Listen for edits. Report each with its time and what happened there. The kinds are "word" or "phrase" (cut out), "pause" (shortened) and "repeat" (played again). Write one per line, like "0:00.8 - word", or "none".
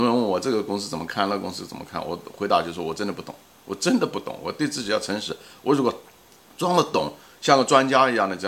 0:03.5 - pause